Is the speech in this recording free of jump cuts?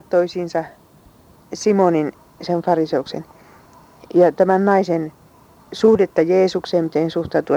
no; 1 cut; at 5.6 s

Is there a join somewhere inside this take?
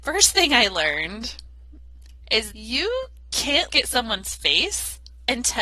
yes; 2 cuts; at 2.5 s, 3.7 s

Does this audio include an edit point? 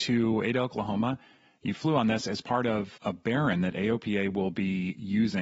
no; 0 cuts

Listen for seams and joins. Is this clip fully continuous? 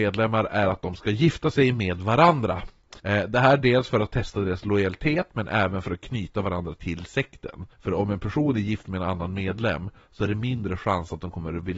no; 2 cuts; at 3.0 s, 7.7 s

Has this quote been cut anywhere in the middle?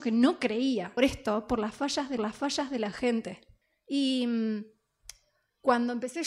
yes; 3 cuts; at 1.0 s, 2.2 s, 3.6 s

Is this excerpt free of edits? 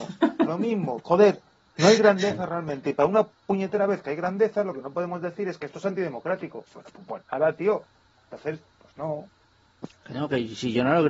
yes; 0 cuts

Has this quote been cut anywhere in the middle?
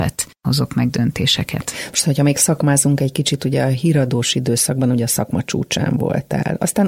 no; 0 cuts

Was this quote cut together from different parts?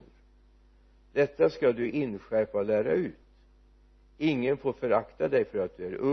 no; 0 cuts

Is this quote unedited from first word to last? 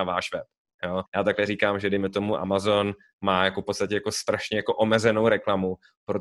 no; 1 cut; at 1.1 s

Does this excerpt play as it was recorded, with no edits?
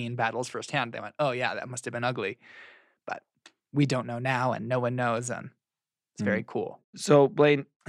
yes; 0 cuts

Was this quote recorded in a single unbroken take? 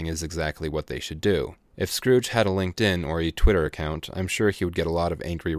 yes; 0 cuts

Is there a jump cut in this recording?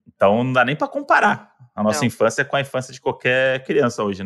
no; 0 cuts

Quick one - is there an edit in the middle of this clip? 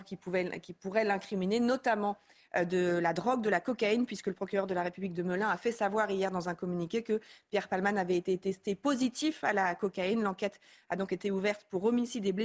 no; 0 cuts

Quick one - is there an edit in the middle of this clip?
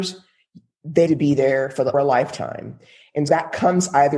yes; 3 cuts; at 1.1 s, 1.9 s, 3.3 s

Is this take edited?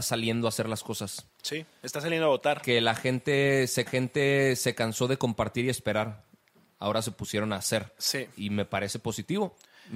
yes; 1 cut; at 3.9 s

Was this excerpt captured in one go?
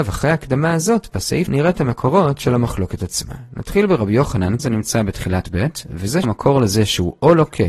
no; 4 cuts; at 1.5 s, 4.6 s, 5.4 s, 6.2 s

